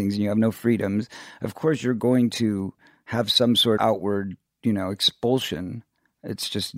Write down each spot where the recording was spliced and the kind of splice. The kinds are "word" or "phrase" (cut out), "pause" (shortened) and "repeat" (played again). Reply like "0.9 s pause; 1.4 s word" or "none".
3.8 s word